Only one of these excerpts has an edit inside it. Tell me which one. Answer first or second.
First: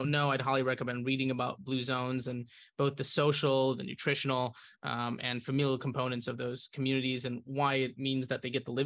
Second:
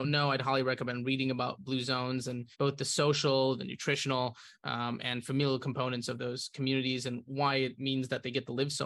second